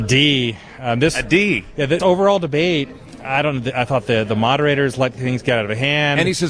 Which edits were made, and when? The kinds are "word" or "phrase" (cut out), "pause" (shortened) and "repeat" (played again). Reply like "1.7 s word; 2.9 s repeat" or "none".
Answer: 2.0 s word